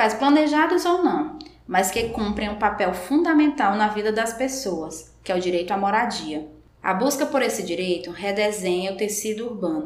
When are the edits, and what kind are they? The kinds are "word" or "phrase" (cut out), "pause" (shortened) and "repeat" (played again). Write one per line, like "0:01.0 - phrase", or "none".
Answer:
none